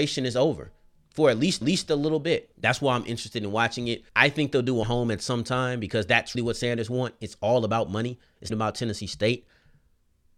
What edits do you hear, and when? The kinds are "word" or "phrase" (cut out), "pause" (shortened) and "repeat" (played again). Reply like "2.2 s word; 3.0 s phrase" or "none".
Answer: 1.6 s repeat; 2.5 s pause; 4.1 s pause; 4.8 s phrase; 6.3 s word; 8.5 s phrase